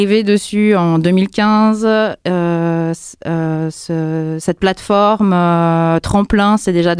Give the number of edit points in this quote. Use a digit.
0